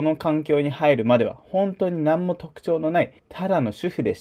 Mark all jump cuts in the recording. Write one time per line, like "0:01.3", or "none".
0:03.2